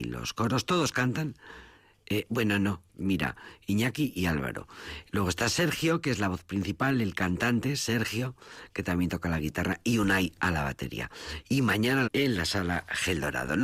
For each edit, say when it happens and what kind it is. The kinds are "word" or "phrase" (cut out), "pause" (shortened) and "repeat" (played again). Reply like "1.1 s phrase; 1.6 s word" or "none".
2.9 s pause; 12.1 s phrase